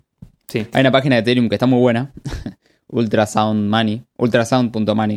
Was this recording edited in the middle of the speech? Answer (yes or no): no